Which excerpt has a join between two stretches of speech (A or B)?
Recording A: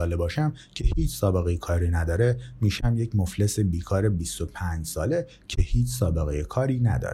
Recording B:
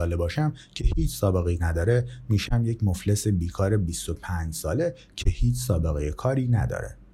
B